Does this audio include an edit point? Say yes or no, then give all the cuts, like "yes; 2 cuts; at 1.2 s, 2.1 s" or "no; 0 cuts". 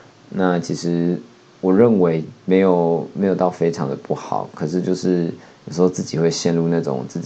no; 0 cuts